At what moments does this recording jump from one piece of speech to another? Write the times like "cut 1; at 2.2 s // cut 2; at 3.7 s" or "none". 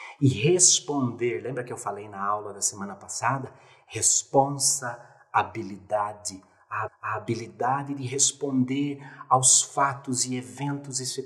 cut 1; at 6.9 s